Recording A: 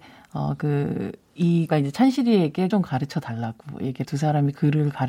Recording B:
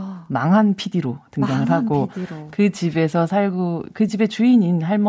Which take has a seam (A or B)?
A